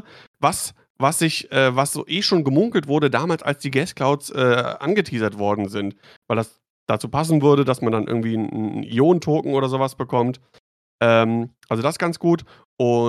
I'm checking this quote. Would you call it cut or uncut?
uncut